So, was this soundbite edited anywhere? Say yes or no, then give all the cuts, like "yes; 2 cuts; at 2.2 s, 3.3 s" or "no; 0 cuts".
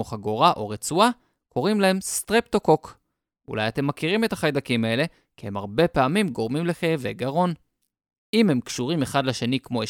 no; 0 cuts